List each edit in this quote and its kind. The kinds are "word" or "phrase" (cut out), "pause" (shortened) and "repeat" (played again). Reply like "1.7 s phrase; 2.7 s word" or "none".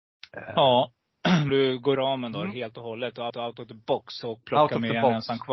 1.5 s word; 1.9 s word; 3.3 s repeat

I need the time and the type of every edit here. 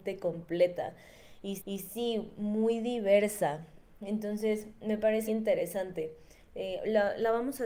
1.6 s repeat; 5.3 s word

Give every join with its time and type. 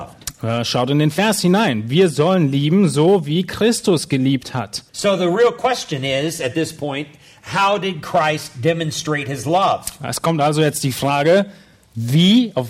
4.9 s pause

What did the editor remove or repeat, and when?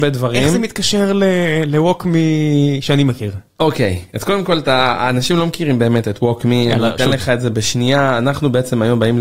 none

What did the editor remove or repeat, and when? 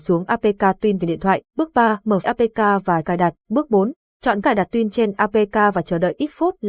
1.5 s pause; 2.2 s word; 3.0 s word; 3.4 s pause; 4.4 s word

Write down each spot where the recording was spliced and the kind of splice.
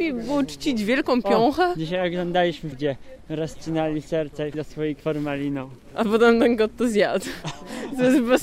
2.7 s word; 4.5 s word; 5.0 s word

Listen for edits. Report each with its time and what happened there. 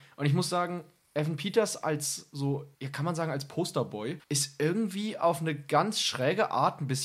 2.7 s pause; 4.2 s pause

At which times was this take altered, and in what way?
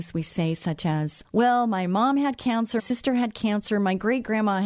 1.2 s word; 2.8 s word

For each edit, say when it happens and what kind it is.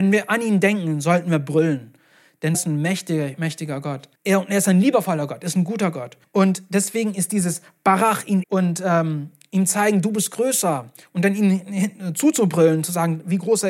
2.5 s word; 4.2 s pause; 6.2 s pause; 8.4 s phrase

